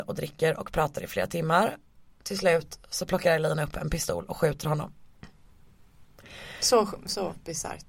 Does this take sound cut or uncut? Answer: uncut